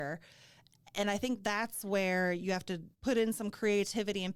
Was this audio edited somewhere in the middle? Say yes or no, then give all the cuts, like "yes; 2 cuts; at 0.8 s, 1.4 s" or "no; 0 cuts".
yes; 1 cut; at 2.9 s